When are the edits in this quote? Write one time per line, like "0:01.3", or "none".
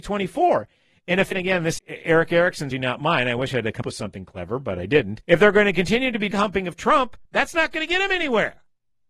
0:01.3
0:01.8
0:02.7
0:03.8
0:05.2
0:06.3
0:07.2